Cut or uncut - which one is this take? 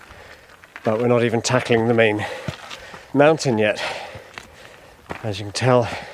cut